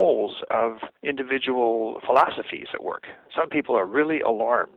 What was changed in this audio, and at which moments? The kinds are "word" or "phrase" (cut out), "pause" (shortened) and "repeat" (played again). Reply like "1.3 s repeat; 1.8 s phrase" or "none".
1.0 s pause